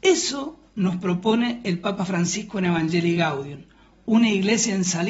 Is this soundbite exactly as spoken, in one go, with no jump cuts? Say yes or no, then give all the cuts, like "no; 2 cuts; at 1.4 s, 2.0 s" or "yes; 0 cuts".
yes; 0 cuts